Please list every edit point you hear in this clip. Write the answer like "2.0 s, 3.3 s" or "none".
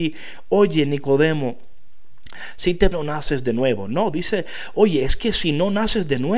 2.9 s